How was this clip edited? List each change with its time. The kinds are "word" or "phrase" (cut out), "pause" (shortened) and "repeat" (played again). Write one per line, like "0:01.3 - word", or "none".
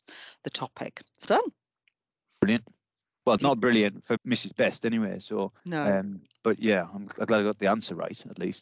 0:01.2 - word
0:03.4 - word
0:04.2 - word
0:05.6 - pause